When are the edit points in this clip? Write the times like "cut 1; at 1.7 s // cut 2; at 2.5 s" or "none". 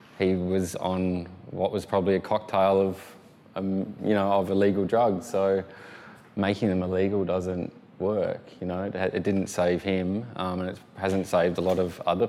none